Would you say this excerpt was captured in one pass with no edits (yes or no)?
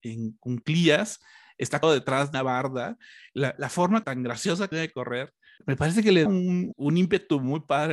no